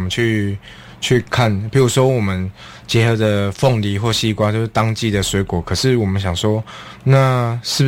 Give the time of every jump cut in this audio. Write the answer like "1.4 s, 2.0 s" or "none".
none